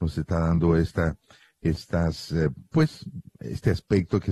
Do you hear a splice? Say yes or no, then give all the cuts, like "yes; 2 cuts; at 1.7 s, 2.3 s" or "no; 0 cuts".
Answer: no; 0 cuts